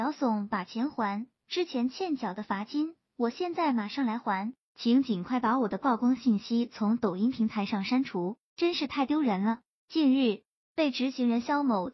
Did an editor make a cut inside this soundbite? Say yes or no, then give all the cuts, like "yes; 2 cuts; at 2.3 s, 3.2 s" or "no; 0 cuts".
no; 0 cuts